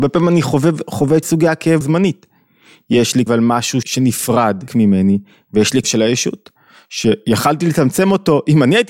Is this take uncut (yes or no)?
no